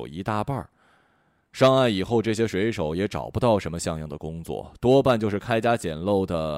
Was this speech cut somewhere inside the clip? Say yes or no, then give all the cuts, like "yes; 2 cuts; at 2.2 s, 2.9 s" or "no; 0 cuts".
no; 0 cuts